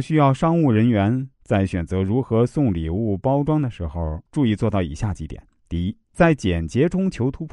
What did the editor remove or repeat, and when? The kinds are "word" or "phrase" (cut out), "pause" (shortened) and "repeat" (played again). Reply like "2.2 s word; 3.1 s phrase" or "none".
1.3 s pause; 4.3 s pause; 5.6 s pause; 6.0 s pause